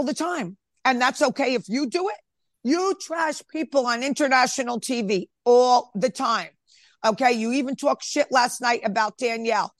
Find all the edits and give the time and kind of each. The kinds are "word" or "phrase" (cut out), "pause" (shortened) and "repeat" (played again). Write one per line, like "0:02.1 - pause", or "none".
none